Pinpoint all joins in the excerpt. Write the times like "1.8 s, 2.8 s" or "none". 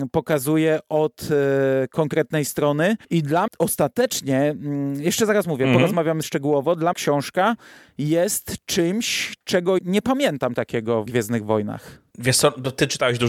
3.0 s, 3.5 s, 6.2 s, 6.9 s, 9.8 s, 10.6 s, 11.1 s